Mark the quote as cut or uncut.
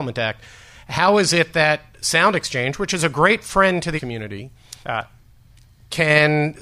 cut